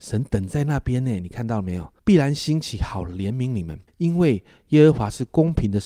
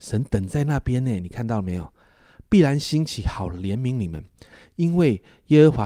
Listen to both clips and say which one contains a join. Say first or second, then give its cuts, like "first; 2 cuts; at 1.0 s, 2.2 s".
first; 2 cuts; at 2.0 s, 3.9 s